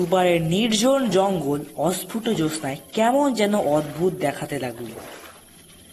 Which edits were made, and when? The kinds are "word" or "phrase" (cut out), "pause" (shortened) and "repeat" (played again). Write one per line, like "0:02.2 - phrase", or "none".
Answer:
none